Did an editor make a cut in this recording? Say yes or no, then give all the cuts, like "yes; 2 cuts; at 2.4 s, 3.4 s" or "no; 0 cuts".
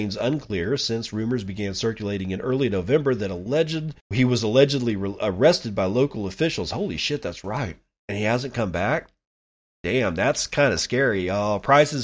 yes; 1 cut; at 4.0 s